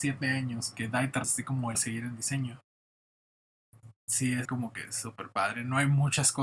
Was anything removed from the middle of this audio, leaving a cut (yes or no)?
yes